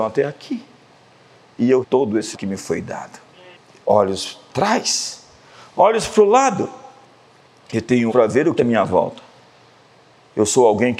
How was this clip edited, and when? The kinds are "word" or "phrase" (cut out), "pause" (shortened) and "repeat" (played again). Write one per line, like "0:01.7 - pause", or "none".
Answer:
0:01.8 - word
0:02.3 - word
0:04.5 - word
0:08.1 - word
0:08.6 - word